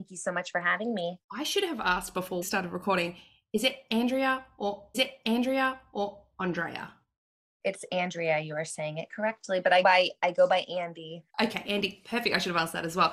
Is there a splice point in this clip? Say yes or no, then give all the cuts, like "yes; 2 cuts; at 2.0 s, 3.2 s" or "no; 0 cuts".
yes; 5 cuts; at 1.2 s, 2.4 s, 4.9 s, 9.8 s, 11.3 s